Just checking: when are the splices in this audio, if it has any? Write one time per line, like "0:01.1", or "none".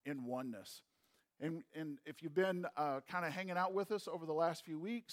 none